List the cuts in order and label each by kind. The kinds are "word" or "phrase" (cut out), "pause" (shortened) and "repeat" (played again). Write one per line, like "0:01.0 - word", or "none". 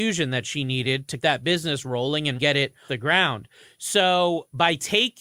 0:01.2 - word
0:02.4 - word
0:02.9 - word